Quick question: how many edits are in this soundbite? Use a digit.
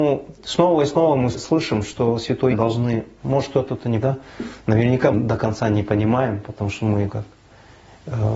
6